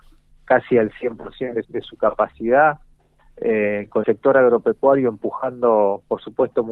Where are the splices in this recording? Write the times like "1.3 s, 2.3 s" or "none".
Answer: 1.6 s, 4.0 s